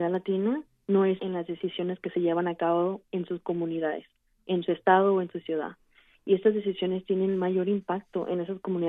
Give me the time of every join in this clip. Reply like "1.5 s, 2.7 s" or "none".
1.2 s